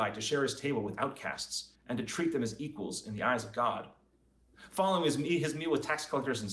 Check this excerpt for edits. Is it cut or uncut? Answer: cut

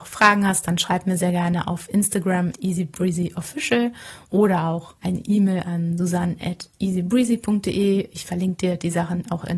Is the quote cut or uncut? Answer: cut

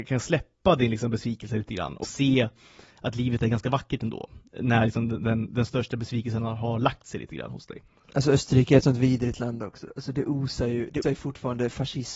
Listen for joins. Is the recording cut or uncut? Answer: cut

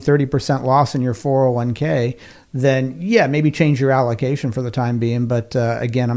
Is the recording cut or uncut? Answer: uncut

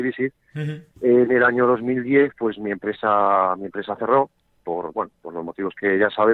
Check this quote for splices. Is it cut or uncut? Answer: cut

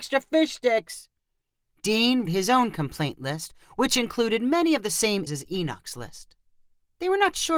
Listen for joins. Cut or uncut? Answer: cut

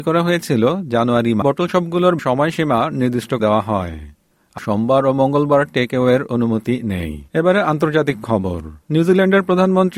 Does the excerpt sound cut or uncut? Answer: cut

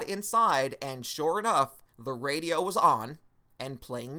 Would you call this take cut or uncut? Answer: cut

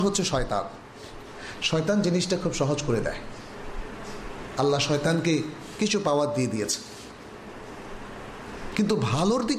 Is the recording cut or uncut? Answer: uncut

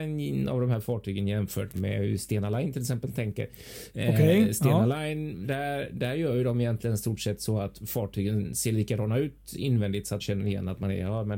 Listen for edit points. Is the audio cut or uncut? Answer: cut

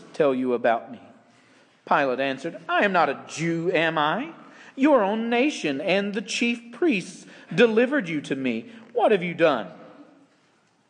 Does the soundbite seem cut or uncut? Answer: uncut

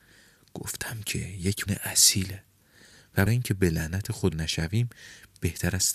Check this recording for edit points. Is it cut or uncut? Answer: cut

